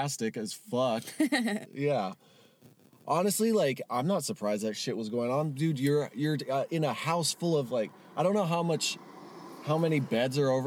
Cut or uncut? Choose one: uncut